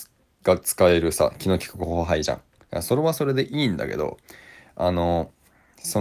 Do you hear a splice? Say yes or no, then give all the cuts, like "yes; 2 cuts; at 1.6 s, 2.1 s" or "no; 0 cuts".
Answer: no; 0 cuts